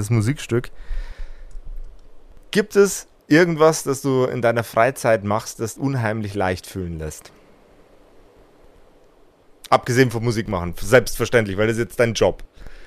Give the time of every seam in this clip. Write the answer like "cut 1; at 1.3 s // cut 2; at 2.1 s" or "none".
cut 1; at 5.8 s